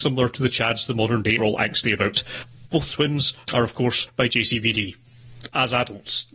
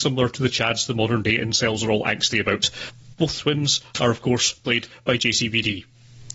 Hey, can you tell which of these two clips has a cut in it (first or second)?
first